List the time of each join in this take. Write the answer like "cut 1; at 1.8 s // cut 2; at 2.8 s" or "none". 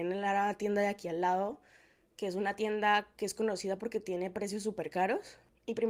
none